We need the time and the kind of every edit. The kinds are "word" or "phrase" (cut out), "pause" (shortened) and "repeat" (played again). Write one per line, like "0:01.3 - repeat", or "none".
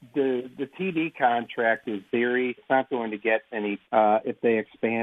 0:02.1 - phrase
0:02.6 - word
0:03.8 - word